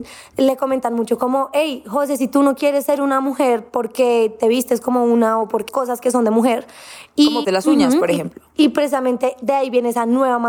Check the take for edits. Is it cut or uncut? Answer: cut